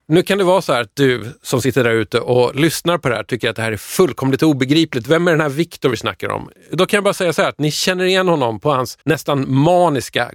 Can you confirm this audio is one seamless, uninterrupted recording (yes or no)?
no